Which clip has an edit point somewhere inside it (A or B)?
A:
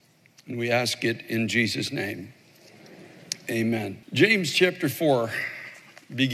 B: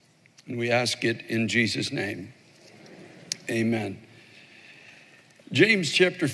A